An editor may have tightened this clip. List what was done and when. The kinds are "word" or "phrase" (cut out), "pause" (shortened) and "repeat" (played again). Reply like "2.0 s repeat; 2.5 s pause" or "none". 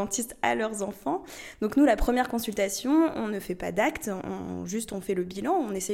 none